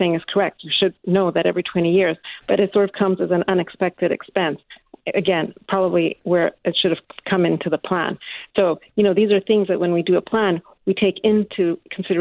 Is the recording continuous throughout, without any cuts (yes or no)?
yes